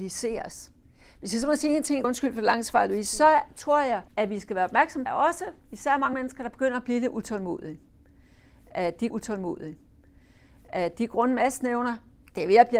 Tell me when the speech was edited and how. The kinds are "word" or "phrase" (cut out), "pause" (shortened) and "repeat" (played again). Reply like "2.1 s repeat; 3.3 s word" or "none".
2.0 s word; 4.1 s pause; 5.1 s phrase; 5.6 s pause; 6.1 s word; 9.1 s repeat